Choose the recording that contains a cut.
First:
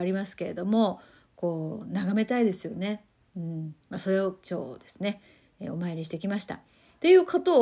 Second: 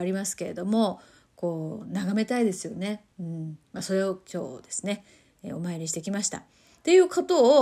second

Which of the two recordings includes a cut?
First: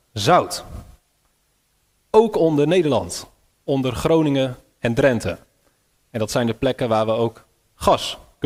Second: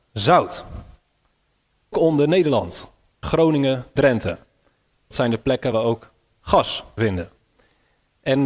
second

